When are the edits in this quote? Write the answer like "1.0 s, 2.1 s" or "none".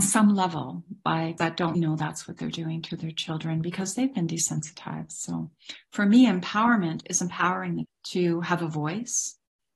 1.4 s, 1.7 s, 7.8 s

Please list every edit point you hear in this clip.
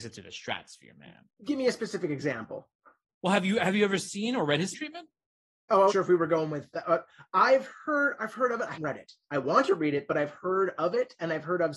4.7 s, 5.9 s, 8.2 s, 8.7 s

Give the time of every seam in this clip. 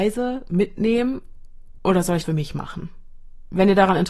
2.2 s

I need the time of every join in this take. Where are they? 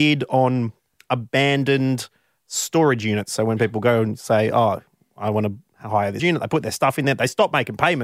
6.2 s

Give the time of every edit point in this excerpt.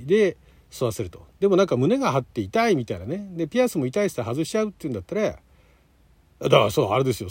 none

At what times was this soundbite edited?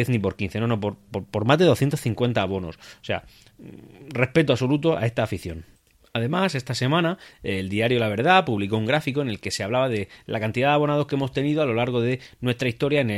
none

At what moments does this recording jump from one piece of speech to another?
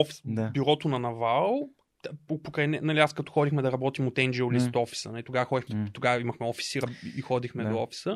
2.3 s, 5.7 s

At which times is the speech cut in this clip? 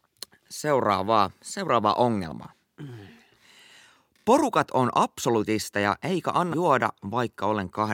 6.5 s

